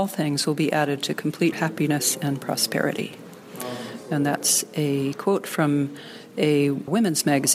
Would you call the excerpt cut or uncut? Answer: cut